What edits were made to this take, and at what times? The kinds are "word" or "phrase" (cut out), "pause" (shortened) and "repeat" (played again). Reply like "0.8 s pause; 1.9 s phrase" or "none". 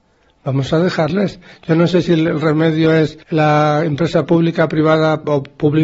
3.2 s pause